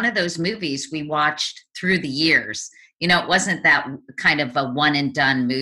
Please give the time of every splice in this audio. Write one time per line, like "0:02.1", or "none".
none